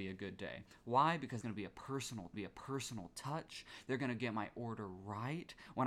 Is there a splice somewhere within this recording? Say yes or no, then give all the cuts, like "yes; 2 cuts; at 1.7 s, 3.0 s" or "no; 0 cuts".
yes; 2 cuts; at 1.4 s, 2.3 s